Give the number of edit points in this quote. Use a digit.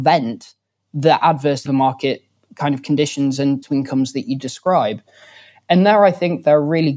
2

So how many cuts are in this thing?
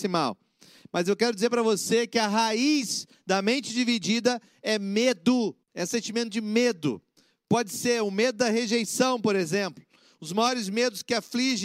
1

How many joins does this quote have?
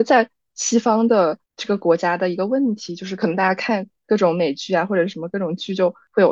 1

